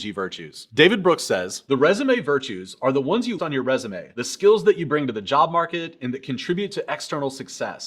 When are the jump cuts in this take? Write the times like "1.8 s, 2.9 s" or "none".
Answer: 3.4 s